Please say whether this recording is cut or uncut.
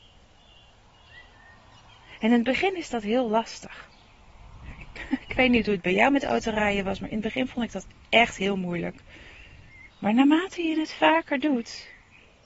cut